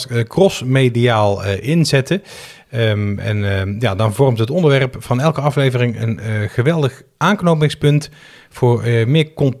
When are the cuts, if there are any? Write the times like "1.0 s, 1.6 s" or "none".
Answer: none